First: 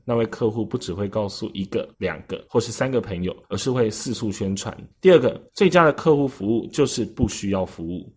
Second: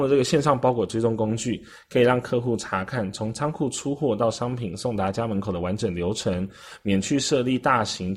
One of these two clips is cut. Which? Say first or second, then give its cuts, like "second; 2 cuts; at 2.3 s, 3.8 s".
first; 5 cuts; at 1.9 s, 2.5 s, 3.4 s, 4.9 s, 5.5 s